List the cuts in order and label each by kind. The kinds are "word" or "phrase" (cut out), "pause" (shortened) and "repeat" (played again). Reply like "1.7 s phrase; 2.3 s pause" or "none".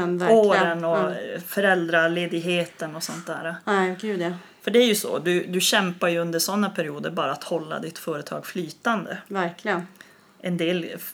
none